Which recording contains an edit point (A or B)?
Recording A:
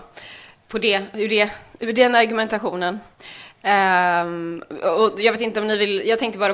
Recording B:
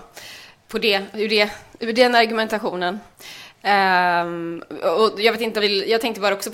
B